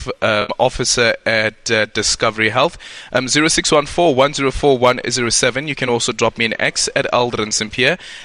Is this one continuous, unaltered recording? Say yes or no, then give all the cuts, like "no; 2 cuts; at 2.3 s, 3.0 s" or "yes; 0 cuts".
yes; 0 cuts